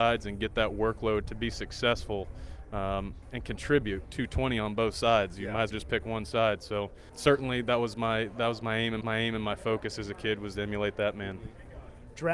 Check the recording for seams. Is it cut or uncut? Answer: cut